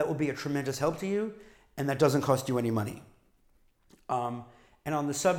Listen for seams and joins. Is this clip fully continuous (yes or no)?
yes